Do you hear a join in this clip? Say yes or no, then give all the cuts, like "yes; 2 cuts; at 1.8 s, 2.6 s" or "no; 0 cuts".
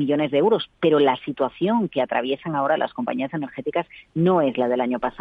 no; 0 cuts